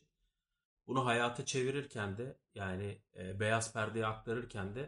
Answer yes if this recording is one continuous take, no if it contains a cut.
no